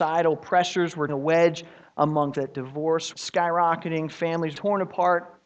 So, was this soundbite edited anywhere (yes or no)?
yes